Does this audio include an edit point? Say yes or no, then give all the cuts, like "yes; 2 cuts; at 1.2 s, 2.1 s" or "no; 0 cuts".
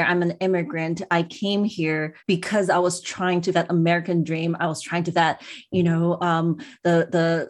yes; 3 cuts; at 2.2 s, 3.5 s, 5.1 s